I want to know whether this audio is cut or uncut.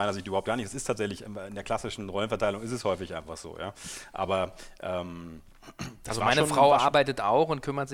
uncut